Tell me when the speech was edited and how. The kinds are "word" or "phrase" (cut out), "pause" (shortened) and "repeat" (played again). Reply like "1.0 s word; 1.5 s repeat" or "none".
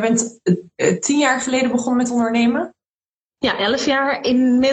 none